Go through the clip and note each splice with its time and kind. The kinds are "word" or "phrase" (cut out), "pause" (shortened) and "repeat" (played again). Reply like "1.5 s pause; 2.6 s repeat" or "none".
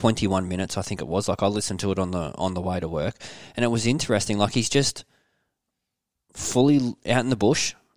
none